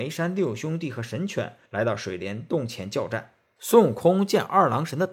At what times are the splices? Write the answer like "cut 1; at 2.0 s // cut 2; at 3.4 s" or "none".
cut 1; at 1.7 s